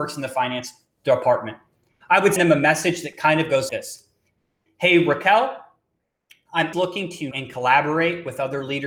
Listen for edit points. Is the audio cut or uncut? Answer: cut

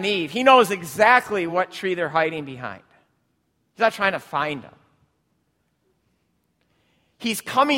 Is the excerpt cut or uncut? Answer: uncut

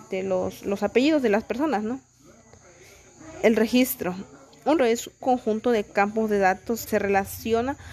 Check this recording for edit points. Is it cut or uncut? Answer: cut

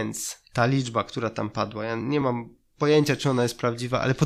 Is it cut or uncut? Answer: uncut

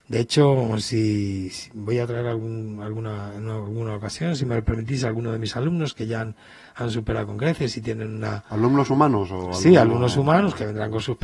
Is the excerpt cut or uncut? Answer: uncut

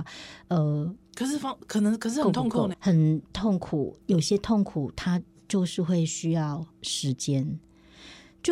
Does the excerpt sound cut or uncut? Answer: cut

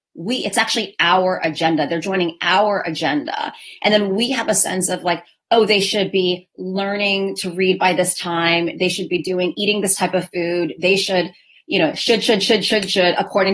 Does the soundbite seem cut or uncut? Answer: uncut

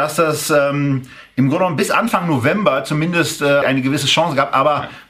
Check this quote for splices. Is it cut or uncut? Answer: cut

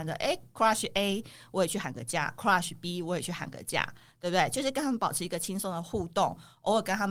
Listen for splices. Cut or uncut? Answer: uncut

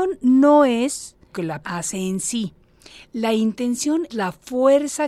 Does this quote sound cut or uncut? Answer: cut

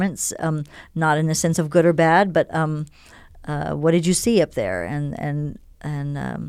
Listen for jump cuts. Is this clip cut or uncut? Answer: uncut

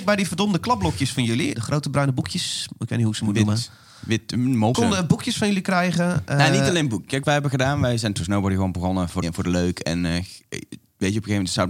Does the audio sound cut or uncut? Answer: cut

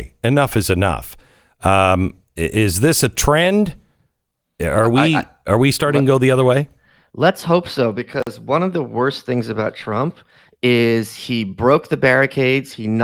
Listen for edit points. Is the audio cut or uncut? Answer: uncut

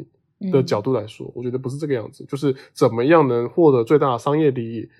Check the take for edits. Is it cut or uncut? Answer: uncut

